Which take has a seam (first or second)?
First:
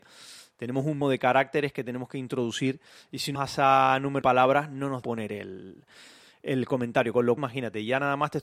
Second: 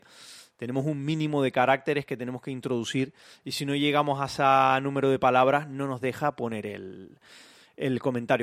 first